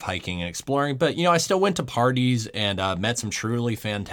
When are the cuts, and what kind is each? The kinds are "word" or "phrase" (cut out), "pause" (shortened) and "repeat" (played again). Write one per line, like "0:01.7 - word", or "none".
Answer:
none